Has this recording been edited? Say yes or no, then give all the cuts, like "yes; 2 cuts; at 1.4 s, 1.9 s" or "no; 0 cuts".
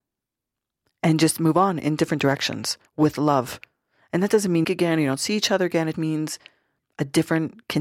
yes; 3 cuts; at 2.9 s, 4.6 s, 5.9 s